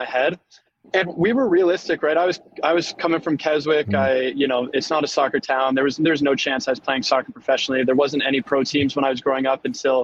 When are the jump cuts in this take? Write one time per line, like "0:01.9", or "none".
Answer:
none